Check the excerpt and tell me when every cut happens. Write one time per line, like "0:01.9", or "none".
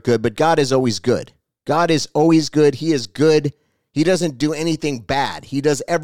none